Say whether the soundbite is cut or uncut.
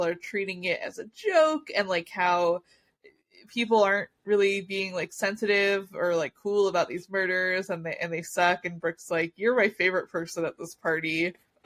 uncut